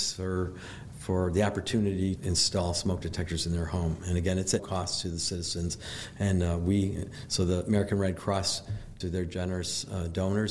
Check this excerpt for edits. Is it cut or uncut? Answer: cut